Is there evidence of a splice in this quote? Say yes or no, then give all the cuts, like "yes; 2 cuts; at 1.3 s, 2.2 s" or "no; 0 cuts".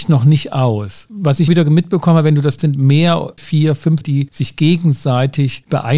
yes; 4 cuts; at 1.5 s, 2.6 s, 3.4 s, 4.0 s